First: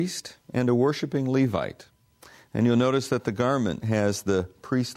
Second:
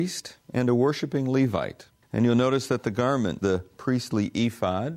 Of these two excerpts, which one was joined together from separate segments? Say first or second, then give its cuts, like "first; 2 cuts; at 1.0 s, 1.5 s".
second; 2 cuts; at 2.0 s, 3.4 s